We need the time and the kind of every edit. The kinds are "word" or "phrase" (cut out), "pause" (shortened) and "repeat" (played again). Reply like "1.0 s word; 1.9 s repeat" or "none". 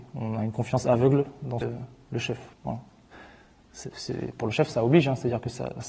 1.6 s phrase; 2.5 s pause